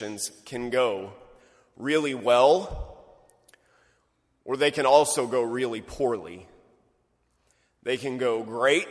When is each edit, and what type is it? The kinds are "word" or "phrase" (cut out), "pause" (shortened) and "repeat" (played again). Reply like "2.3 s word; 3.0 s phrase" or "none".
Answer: none